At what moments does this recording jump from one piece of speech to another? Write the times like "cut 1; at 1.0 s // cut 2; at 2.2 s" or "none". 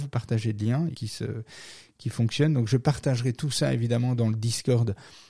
cut 1; at 0.9 s